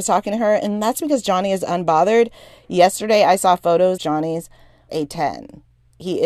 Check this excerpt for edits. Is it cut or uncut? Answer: cut